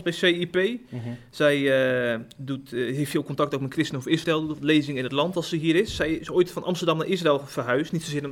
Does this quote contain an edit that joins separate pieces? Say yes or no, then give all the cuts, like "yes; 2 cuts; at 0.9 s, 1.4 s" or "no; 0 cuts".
no; 0 cuts